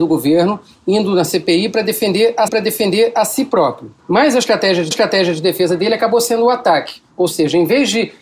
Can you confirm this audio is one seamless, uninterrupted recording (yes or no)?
no